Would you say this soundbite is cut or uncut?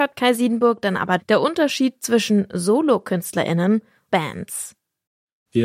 cut